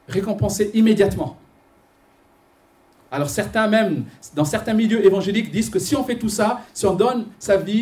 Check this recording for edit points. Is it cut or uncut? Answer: uncut